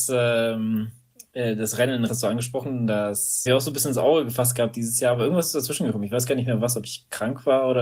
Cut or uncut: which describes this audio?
cut